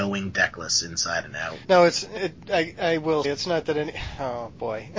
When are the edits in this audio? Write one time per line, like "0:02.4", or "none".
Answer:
0:01.6
0:02.2
0:03.2